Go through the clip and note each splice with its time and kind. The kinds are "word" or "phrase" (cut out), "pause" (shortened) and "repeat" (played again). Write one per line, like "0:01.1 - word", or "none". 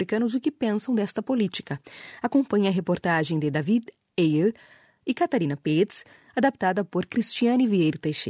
none